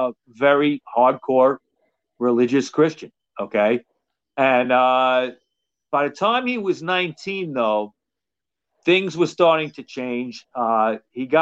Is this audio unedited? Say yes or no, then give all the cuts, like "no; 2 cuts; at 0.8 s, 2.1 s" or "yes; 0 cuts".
yes; 0 cuts